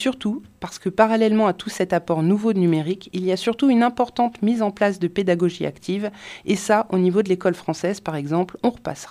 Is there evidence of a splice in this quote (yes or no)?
no